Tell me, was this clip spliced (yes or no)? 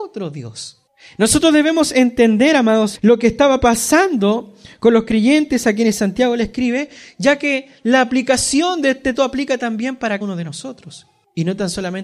yes